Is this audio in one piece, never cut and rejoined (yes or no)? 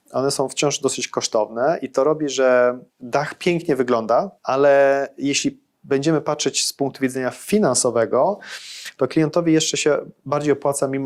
no